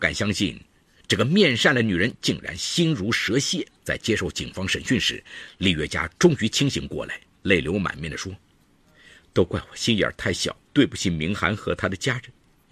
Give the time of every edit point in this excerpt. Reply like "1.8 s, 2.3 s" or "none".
3.8 s, 10.6 s